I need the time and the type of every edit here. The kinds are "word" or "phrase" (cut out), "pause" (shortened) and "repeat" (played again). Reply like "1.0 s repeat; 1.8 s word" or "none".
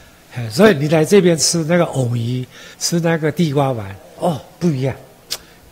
2.7 s pause